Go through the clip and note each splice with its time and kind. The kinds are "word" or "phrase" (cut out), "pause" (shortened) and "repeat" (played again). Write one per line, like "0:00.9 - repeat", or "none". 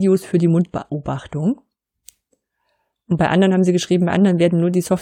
none